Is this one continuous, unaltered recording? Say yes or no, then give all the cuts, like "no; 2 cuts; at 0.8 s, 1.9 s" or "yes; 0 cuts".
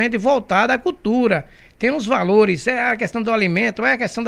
yes; 0 cuts